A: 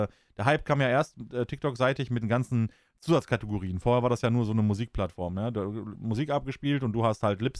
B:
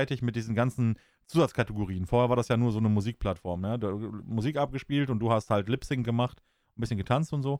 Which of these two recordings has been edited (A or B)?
A